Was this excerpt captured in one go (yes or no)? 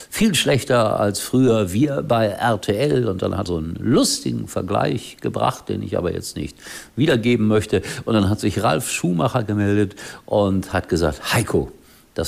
no